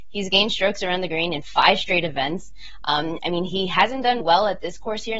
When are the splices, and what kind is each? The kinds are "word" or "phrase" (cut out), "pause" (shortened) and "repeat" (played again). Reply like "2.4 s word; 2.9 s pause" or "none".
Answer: 4.2 s word